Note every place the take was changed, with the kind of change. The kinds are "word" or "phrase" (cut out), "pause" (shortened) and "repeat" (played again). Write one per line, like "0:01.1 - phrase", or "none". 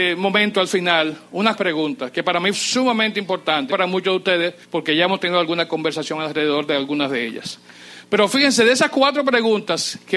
0:01.6 - word
0:02.5 - word
0:03.7 - phrase
0:04.6 - pause

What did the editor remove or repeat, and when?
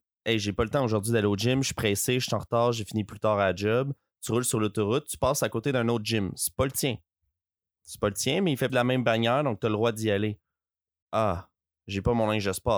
0:08.7 - word

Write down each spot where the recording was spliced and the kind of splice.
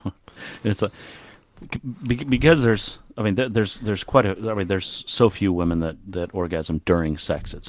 none

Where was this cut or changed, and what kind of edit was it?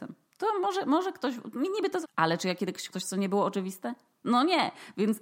0:02.0 - word
0:02.9 - word

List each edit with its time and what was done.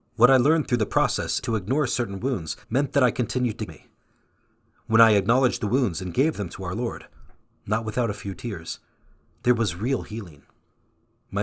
0:01.4 - phrase
0:02.6 - pause
0:03.7 - phrase

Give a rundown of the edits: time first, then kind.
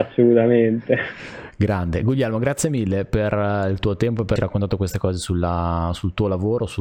0:04.4 - word

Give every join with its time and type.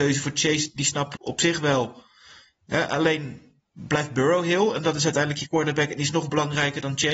0:01.2 - word

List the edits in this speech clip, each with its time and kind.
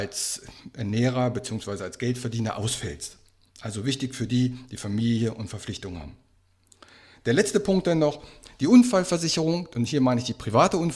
none

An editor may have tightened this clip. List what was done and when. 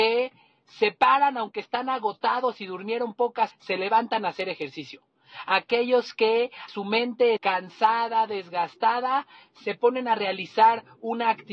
0:03.5 - word
0:06.7 - word
0:07.4 - word

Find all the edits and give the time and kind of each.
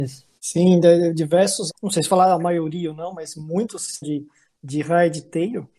0:01.7 - word
0:04.0 - word

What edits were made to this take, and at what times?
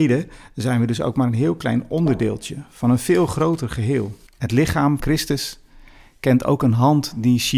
0:04.3 - pause
0:05.0 - word

